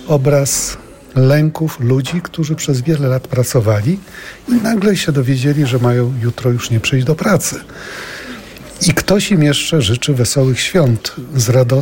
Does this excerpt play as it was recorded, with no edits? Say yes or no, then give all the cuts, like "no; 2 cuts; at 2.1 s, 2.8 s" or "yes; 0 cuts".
yes; 0 cuts